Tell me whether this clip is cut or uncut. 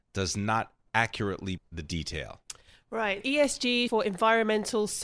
cut